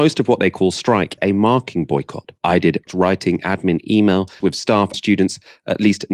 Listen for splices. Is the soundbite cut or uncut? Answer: cut